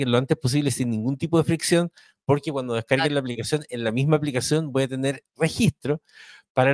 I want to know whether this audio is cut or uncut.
uncut